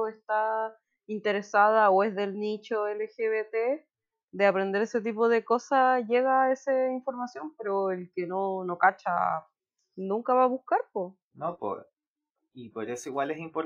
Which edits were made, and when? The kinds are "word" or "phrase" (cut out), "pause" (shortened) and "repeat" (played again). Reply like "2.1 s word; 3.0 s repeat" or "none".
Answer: none